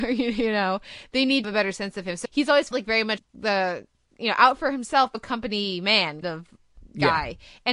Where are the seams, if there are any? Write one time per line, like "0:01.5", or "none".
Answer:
0:01.4
0:02.2
0:02.7
0:03.2
0:05.1
0:06.2

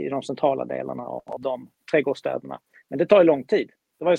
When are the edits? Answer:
none

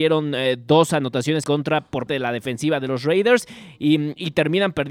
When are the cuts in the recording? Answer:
0:01.4
0:02.1

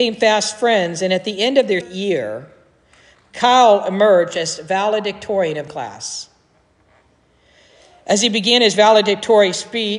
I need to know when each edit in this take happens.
0:01.8
0:05.7

